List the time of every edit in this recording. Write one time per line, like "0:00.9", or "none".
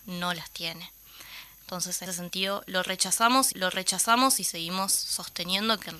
0:02.1
0:03.5

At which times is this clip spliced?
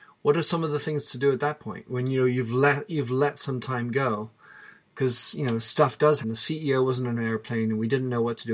0:06.2

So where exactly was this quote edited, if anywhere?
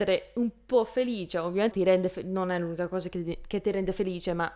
0:01.7

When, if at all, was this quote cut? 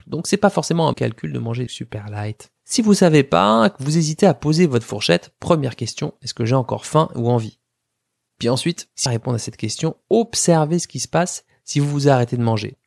0:00.9
0:01.7
0:09.1

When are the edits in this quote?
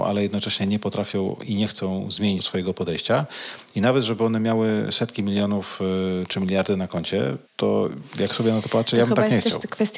0:02.4
0:07.5

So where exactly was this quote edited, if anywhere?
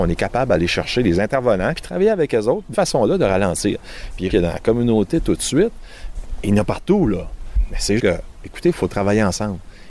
0:01.7
0:02.7
0:04.3
0:08.0

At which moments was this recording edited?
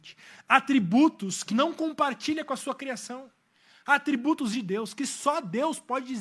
0:01.5
0:04.5

